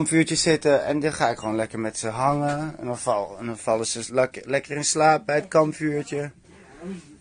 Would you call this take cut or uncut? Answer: uncut